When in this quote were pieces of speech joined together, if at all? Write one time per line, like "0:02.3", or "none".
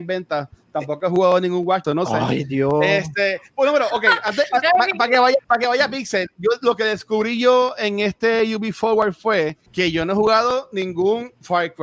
0:01.8
0:05.4
0:09.7